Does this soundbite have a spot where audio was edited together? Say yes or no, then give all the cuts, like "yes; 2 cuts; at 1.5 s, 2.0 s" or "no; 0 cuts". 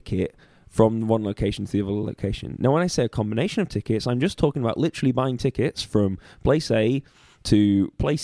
no; 0 cuts